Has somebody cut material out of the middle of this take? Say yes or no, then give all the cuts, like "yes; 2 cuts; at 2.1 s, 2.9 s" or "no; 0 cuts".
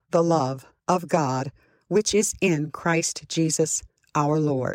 no; 0 cuts